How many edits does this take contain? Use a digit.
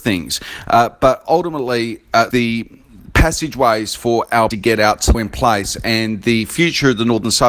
3